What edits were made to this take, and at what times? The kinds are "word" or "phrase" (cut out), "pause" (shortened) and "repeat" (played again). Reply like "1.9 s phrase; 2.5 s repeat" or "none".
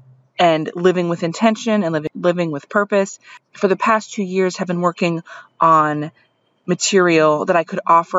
none